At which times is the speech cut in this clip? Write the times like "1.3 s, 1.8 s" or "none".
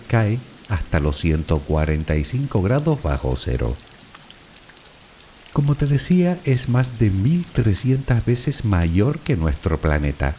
none